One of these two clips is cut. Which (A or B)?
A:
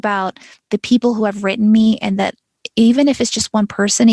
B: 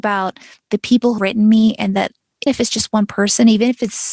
B